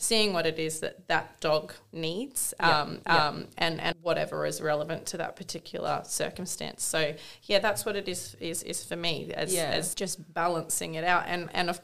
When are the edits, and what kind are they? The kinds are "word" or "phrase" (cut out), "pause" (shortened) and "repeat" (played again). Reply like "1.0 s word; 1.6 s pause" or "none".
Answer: 3.0 s repeat; 3.9 s word; 9.9 s word